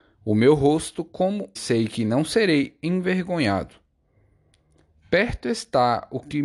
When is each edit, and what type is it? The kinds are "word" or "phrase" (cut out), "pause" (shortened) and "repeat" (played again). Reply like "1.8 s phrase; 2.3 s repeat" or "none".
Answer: 1.6 s phrase

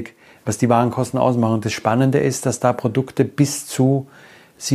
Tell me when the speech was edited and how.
none

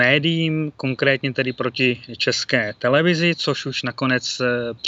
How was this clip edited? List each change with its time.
none

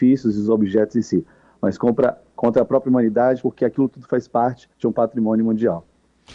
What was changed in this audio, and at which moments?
4.7 s pause

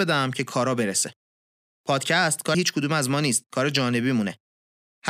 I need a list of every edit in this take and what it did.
2.5 s word

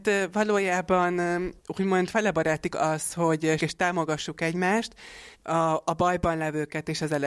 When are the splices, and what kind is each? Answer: 1.6 s pause; 2.7 s word; 3.6 s word; 5.3 s pause

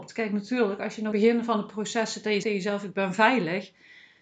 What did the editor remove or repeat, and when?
1.1 s phrase; 2.4 s word

